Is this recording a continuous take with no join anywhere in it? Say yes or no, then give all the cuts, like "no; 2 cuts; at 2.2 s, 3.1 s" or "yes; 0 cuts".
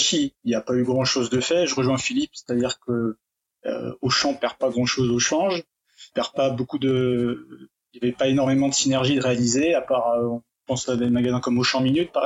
yes; 0 cuts